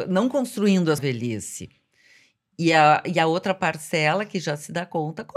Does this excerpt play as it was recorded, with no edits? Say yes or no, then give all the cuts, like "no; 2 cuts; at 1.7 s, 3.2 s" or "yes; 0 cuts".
no; 1 cut; at 1.0 s